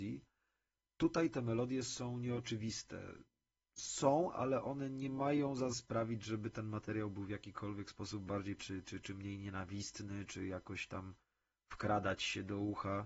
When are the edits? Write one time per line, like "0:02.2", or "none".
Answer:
0:05.7
0:08.6